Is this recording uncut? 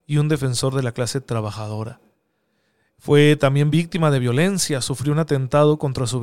yes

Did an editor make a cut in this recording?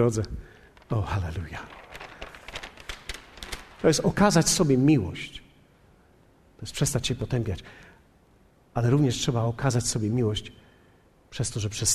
no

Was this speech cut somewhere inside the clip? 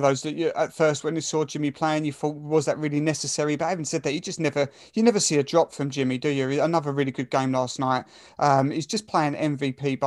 no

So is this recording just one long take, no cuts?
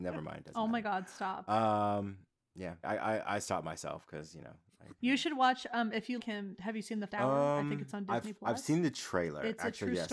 no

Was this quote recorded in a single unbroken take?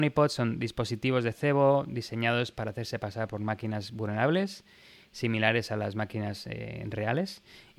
yes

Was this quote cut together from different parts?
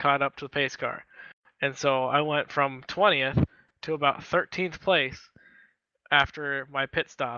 no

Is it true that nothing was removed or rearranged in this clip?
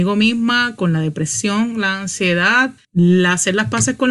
yes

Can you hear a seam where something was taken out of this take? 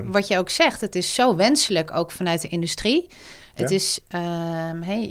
no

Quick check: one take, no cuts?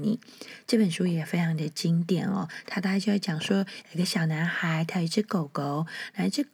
yes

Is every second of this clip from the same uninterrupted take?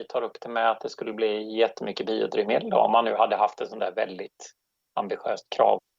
yes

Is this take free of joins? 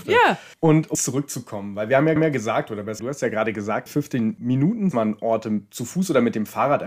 no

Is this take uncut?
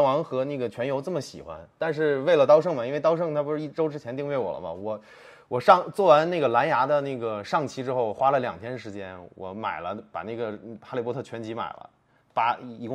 yes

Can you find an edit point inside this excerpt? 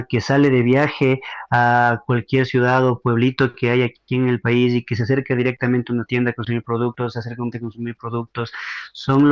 yes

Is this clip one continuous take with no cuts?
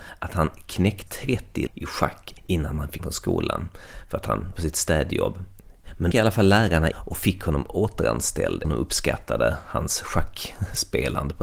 no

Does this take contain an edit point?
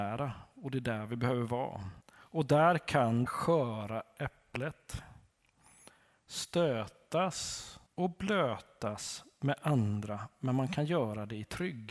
yes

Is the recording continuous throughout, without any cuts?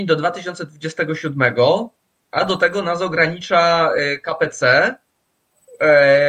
yes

